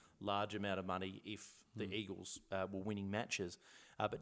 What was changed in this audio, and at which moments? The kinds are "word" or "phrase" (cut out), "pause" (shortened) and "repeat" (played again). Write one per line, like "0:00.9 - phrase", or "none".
none

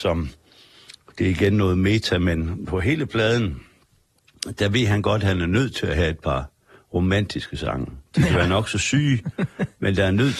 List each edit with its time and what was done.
0:08.1 - pause

